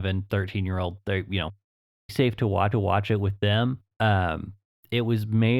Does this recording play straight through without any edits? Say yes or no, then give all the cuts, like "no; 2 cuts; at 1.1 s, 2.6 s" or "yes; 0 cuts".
no; 3 cuts; at 2.1 s, 2.7 s, 3.9 s